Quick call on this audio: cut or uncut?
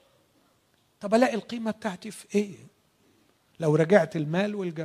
uncut